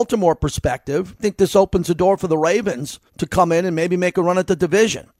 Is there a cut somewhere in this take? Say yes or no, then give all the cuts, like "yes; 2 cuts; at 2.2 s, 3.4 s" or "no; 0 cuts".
yes; 2 cuts; at 1.2 s, 3.1 s